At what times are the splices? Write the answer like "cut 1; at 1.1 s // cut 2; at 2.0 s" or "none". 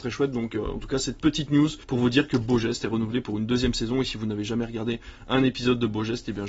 cut 1; at 1.8 s

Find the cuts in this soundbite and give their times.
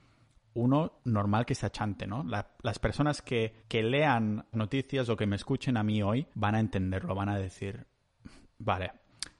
cut 1; at 1.0 s // cut 2; at 3.6 s // cut 3; at 4.5 s // cut 4; at 6.3 s

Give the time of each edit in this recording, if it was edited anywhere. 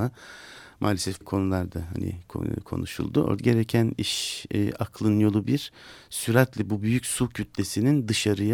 cut 1; at 1.2 s // cut 2; at 3.4 s

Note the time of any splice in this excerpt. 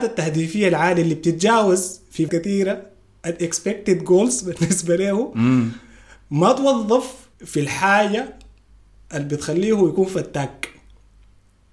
cut 1; at 2.3 s // cut 2; at 7.3 s

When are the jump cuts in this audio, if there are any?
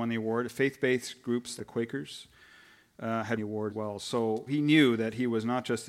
cut 1; at 1.6 s // cut 2; at 3.4 s // cut 3; at 3.7 s // cut 4; at 4.5 s

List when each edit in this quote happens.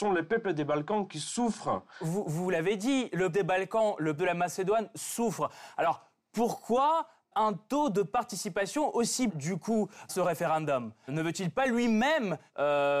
cut 1; at 3.3 s // cut 2; at 4.2 s // cut 3; at 7.3 s // cut 4; at 9.3 s // cut 5; at 10.1 s // cut 6; at 11.1 s

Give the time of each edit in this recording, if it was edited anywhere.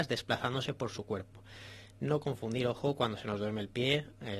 none

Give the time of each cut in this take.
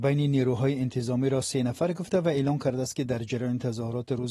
none

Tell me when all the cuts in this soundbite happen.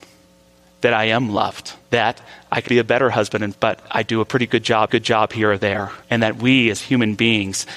cut 1; at 1.8 s // cut 2; at 2.7 s // cut 3; at 3.5 s // cut 4; at 4.9 s // cut 5; at 6.0 s

